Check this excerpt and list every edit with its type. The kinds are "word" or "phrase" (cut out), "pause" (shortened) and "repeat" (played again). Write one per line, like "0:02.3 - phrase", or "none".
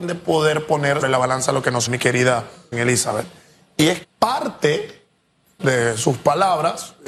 0:01.0 - word
0:01.9 - word
0:02.7 - word
0:04.0 - word
0:05.6 - word